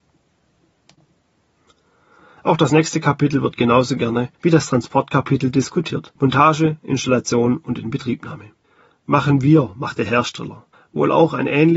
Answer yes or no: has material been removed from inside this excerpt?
yes